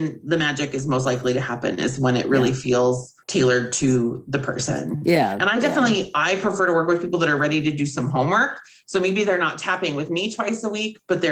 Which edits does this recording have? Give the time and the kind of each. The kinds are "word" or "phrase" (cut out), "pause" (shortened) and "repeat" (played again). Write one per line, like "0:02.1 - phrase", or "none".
0:03.2 - pause